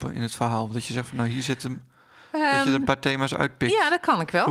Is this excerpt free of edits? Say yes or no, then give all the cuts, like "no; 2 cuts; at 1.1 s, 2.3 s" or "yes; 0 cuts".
yes; 0 cuts